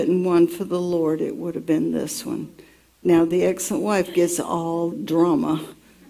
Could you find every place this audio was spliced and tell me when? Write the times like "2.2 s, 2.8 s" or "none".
4.9 s